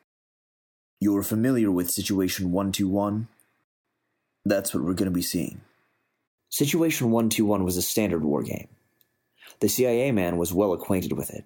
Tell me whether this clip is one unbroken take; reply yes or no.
no